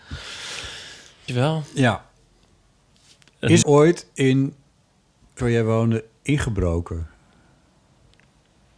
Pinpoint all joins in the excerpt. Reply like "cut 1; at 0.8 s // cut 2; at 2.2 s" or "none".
cut 1; at 1.3 s // cut 2; at 3.6 s // cut 3; at 5.4 s